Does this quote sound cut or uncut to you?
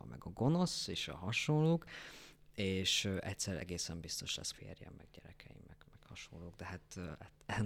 cut